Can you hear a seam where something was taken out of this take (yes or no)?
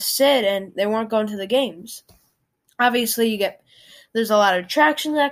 no